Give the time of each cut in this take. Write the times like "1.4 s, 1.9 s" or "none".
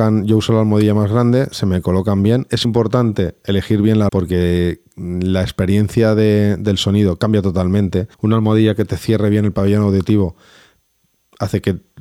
2.6 s, 4.1 s, 8.1 s